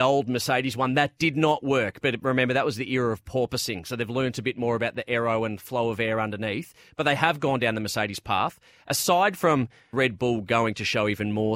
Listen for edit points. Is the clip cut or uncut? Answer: cut